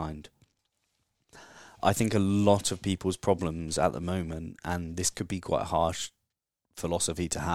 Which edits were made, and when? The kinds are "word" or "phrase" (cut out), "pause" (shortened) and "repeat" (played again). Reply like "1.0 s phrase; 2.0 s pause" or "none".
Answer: 6.3 s pause